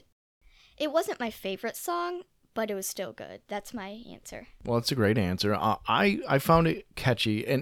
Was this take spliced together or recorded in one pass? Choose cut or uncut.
uncut